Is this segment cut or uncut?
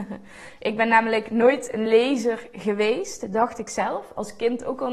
uncut